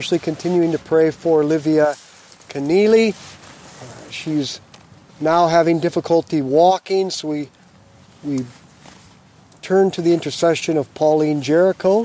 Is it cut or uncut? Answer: uncut